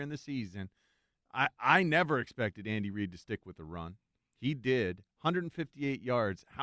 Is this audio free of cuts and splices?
yes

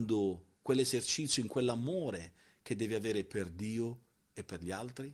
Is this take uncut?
yes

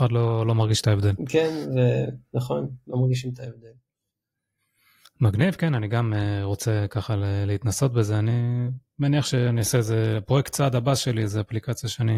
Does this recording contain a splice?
no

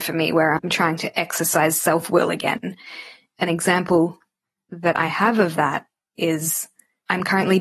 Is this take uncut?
yes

